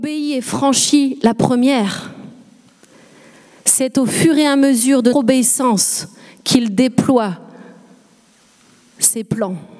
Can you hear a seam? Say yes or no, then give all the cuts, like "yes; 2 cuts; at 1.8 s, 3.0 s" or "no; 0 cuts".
yes; 1 cut; at 5.1 s